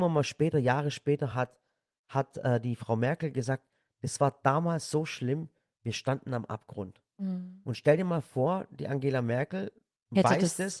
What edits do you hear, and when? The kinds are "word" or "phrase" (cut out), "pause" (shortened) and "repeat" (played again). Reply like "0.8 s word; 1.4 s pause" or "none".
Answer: none

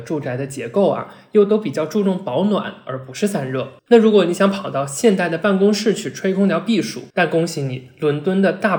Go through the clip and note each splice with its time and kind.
3.8 s pause; 7.1 s pause

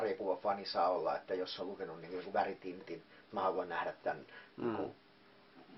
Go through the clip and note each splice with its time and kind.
3.3 s word

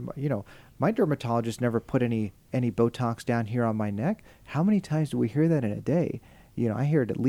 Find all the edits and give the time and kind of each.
none

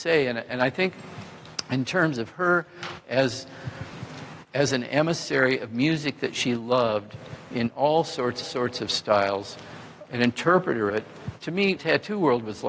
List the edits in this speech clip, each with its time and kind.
8.4 s repeat; 10.0 s word; 10.9 s word; 11.8 s word

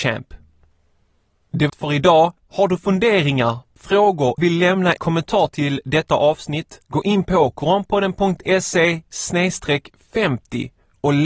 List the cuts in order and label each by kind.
1.7 s word; 2.4 s pause; 4.4 s word; 5.0 s word; 6.9 s pause

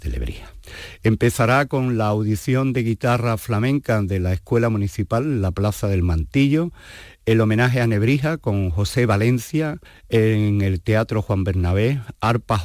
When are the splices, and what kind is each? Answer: 9.8 s pause

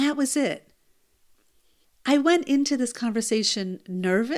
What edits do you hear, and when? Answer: none

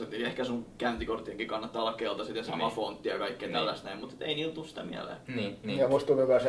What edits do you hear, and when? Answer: 5.3 s pause

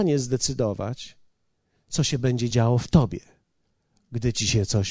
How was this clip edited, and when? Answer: none

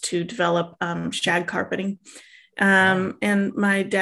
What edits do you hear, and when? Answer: none

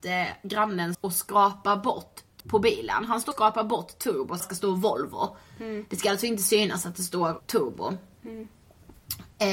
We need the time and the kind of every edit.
0.9 s word; 2.4 s word; 3.3 s word; 4.4 s phrase; 7.4 s word

